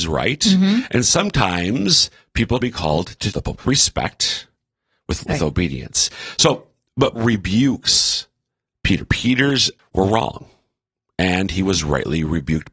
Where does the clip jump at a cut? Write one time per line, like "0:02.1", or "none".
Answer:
0:02.6
0:03.3
0:03.6
0:05.2
0:07.1
0:09.8

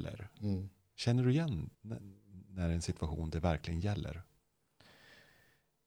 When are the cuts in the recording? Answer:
0:01.7

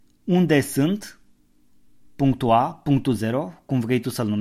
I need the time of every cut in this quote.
none

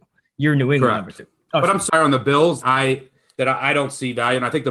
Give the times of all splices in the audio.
0:01.9
0:02.6

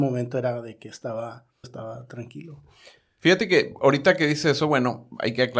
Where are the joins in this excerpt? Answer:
0:01.6

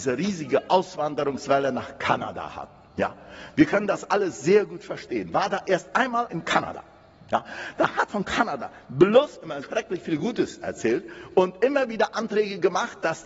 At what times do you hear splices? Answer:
0:06.3
0:08.1
0:09.6

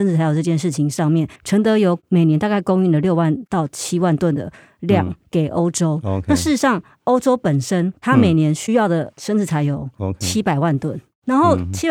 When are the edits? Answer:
0:01.4
0:08.0

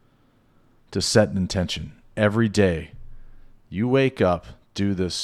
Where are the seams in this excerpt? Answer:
none

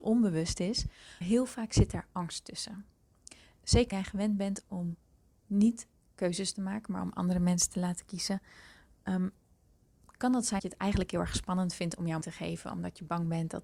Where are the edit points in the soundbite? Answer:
0:01.2
0:03.9
0:10.6
0:12.2

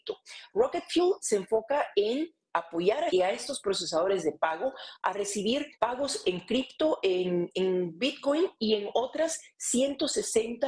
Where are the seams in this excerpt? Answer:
0:03.1
0:05.7

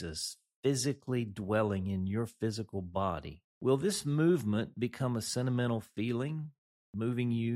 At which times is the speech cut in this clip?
0:03.5

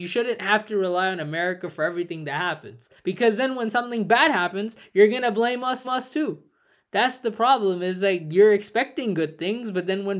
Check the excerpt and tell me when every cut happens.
0:03.0
0:05.8

